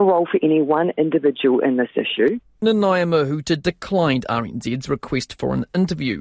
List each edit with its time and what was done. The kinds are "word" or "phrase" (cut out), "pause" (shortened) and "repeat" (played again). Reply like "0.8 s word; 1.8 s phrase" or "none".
none